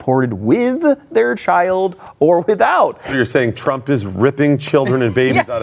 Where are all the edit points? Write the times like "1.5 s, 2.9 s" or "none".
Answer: none